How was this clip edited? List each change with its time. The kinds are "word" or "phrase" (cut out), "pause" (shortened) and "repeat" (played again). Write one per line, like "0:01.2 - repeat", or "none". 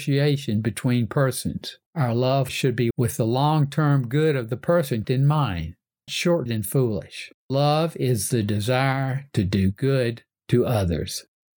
0:01.9 - pause
0:02.5 - phrase
0:02.9 - word
0:05.0 - word
0:06.1 - word
0:06.5 - word
0:07.4 - pause